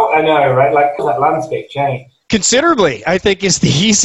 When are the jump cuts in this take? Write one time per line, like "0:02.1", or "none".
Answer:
0:01.0
0:02.2